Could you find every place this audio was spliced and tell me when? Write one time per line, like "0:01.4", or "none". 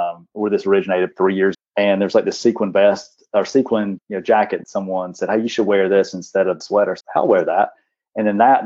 0:01.1
0:01.5
0:04.0
0:04.6
0:06.6
0:07.0